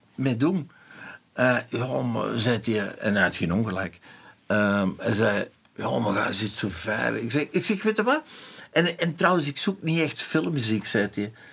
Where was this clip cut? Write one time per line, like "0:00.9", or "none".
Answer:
none